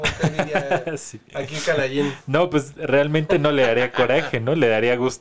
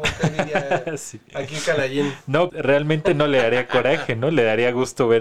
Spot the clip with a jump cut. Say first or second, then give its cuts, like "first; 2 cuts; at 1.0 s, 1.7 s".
second; 1 cut; at 2.5 s